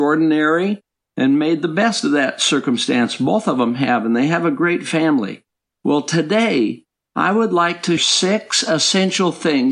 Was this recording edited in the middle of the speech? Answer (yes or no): yes